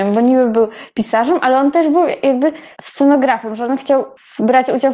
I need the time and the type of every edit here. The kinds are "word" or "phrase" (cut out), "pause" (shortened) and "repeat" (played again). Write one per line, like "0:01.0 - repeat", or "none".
0:02.8 - word